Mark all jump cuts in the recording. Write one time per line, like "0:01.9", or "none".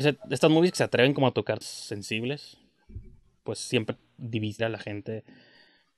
0:01.6
0:03.9
0:04.6